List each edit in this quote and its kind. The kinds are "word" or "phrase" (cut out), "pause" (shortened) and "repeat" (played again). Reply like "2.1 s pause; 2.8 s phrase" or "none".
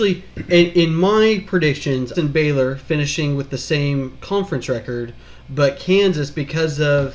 2.1 s phrase